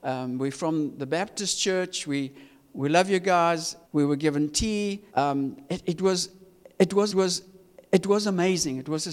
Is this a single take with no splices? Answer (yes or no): no